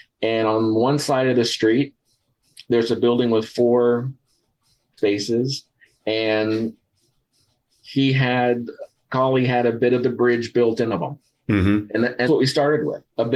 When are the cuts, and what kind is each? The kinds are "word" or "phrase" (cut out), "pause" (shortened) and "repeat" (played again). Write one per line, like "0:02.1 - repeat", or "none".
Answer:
0:05.0 - word
0:10.9 - word
0:12.3 - word